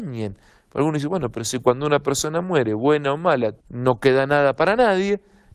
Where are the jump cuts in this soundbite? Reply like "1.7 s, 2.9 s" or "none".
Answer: 3.6 s